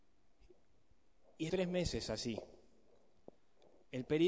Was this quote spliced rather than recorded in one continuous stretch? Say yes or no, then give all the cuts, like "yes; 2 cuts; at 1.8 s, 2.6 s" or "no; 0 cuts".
yes; 1 cut; at 1.5 s